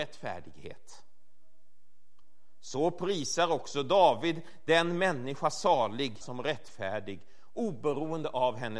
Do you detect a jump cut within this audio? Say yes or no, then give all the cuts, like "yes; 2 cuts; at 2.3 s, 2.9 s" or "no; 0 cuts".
yes; 1 cut; at 6.2 s